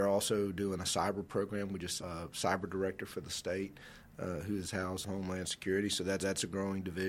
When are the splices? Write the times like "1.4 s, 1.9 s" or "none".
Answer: 2.0 s, 5.0 s, 6.2 s